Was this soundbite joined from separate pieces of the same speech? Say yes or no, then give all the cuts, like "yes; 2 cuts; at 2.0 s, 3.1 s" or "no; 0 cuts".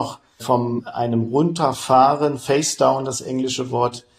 no; 0 cuts